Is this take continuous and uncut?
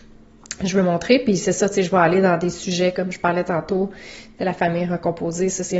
yes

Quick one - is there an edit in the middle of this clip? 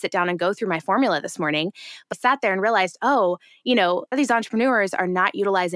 yes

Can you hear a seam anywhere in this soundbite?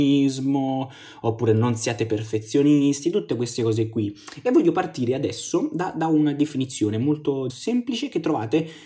yes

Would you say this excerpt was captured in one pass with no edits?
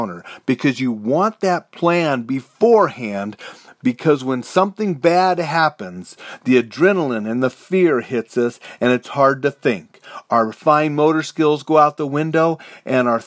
yes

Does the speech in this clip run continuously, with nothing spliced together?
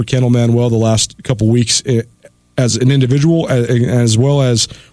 yes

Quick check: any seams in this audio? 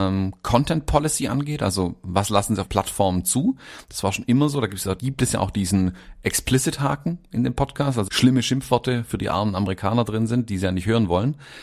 yes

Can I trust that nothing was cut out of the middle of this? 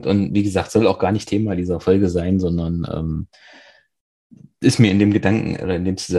yes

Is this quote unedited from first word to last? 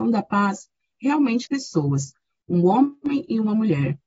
no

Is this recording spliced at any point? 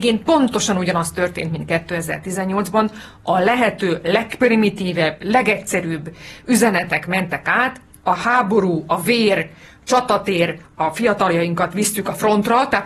no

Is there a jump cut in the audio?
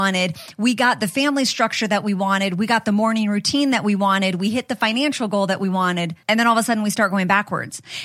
yes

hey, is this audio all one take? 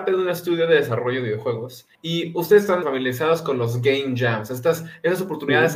no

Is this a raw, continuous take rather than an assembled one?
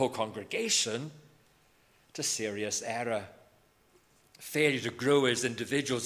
yes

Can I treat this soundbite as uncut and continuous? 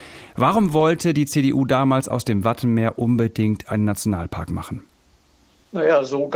yes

